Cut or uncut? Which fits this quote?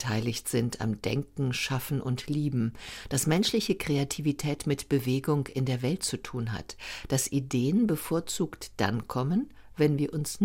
uncut